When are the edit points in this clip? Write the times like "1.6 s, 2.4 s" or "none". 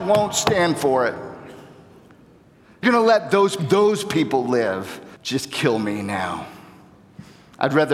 2.8 s, 3.6 s, 5.2 s